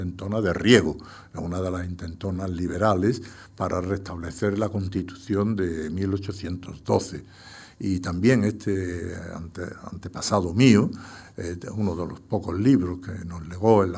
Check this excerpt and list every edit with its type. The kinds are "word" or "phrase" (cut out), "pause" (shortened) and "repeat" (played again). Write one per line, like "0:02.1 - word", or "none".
none